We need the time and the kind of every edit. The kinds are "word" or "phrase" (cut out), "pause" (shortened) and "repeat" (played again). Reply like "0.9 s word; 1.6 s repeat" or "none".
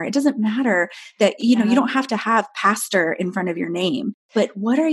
none

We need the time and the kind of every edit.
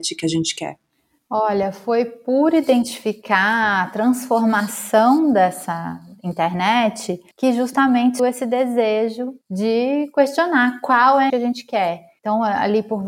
7.3 s pause; 8.2 s word; 9.4 s pause; 11.3 s word; 12.2 s pause

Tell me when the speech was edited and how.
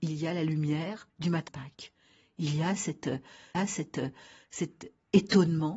1.1 s pause; 1.5 s word; 3.5 s repeat

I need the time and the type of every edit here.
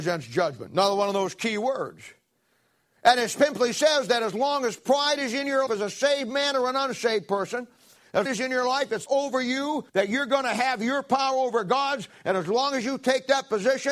5.7 s word; 8.2 s phrase; 9.1 s phrase; 9.9 s pause

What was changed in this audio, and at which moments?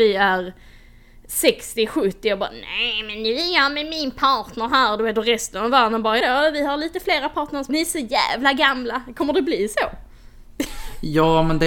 6.2 s word; 7.7 s word

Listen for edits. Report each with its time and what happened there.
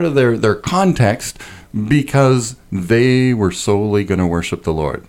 none

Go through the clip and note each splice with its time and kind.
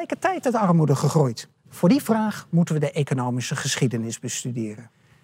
1.6 s pause

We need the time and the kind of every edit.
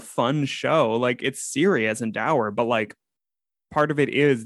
none

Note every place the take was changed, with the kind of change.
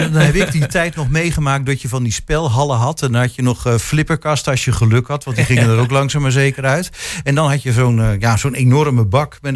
none

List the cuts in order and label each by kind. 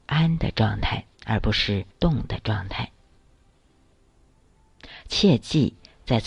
1.1 s pause; 1.9 s pause

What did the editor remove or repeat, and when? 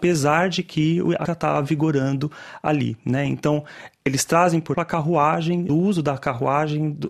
1.3 s word; 4.7 s word; 5.7 s phrase

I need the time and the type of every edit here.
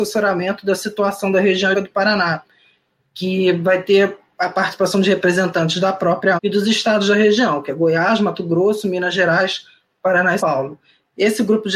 1.7 s word; 6.4 s word; 10.4 s word

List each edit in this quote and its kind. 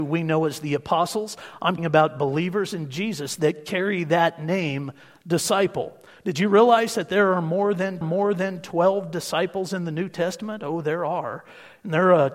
1.8 s word; 8.0 s repeat

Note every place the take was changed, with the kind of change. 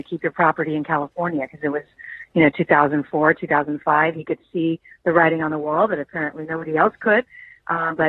none

